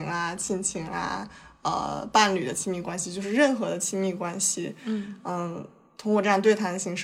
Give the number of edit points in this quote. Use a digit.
0